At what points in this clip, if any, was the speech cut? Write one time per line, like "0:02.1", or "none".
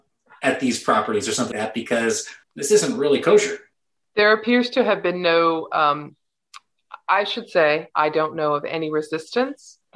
0:01.5
0:02.4
0:03.7